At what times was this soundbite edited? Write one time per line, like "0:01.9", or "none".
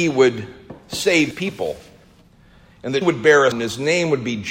0:01.3
0:03.0
0:03.5